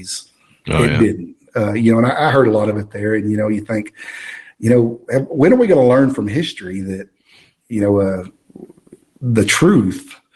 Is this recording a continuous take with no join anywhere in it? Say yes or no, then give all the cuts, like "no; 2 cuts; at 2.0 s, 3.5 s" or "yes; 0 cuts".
yes; 0 cuts